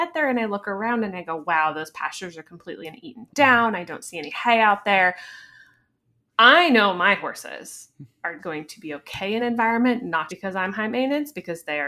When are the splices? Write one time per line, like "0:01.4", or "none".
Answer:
0:02.8
0:08.4
0:09.4
0:10.3